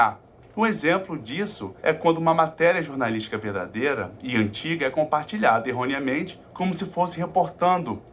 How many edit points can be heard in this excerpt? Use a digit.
2